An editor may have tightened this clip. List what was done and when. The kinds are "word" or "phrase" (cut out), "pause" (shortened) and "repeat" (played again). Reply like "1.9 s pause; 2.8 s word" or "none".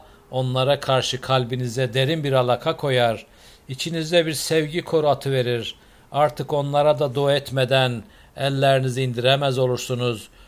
none